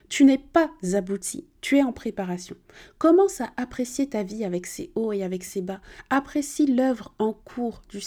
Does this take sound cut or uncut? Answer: uncut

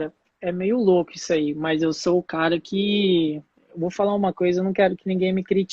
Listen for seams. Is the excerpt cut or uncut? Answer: uncut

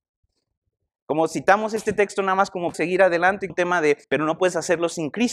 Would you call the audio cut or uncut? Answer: cut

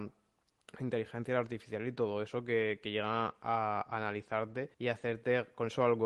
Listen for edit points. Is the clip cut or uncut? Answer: cut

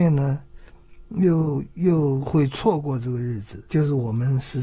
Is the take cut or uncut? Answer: cut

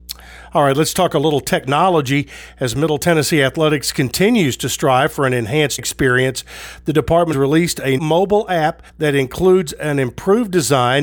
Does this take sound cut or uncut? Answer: cut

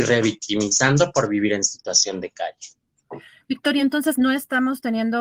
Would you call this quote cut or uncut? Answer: uncut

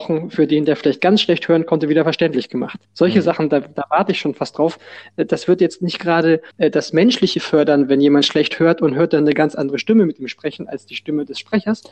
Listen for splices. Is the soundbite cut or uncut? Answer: cut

